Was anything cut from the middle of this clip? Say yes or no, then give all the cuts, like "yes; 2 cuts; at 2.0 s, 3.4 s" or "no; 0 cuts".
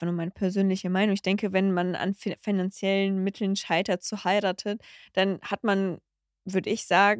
no; 0 cuts